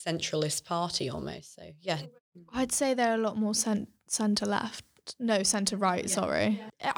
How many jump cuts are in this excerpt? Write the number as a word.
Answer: one